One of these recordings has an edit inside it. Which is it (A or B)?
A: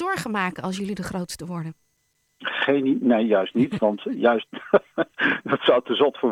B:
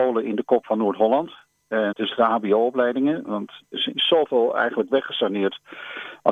B